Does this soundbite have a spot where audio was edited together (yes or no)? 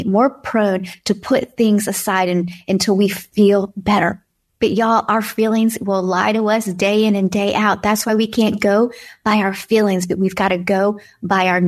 no